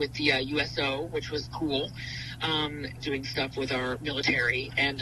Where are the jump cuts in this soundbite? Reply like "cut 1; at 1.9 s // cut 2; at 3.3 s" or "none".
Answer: cut 1; at 1.5 s // cut 2; at 3.0 s